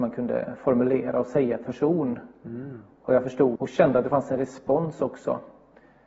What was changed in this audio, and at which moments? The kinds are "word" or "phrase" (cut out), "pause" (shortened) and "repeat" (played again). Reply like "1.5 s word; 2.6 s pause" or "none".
1.7 s word; 3.6 s word